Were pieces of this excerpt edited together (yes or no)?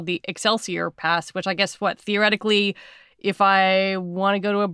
no